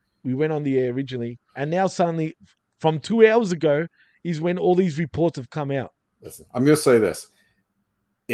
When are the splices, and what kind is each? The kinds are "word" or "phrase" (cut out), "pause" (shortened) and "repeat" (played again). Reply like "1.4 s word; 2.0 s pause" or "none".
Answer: 1.5 s pause